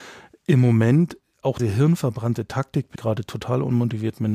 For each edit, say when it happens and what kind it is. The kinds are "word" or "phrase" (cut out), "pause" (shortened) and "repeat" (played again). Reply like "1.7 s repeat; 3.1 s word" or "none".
1.6 s phrase; 3.0 s word